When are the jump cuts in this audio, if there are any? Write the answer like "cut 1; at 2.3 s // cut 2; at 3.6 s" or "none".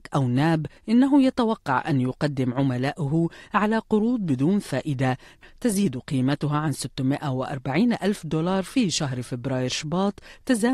none